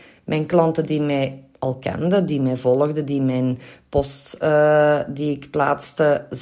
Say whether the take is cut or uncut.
uncut